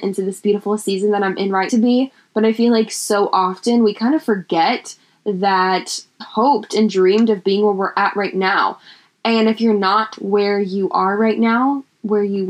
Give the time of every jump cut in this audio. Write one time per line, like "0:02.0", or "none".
0:01.7
0:06.2